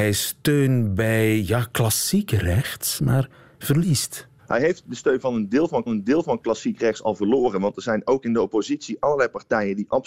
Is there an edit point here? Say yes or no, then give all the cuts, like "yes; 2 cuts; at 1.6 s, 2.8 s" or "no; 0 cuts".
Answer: yes; 3 cuts; at 3.0 s, 4.4 s, 5.9 s